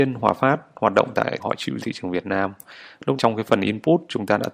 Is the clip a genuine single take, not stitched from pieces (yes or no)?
no